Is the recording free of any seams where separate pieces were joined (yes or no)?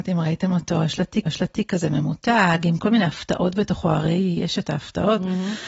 no